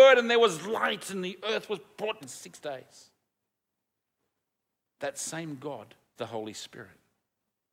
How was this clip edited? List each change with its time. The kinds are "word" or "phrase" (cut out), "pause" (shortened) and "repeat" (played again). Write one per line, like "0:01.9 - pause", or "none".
0:02.2 - word
0:06.2 - word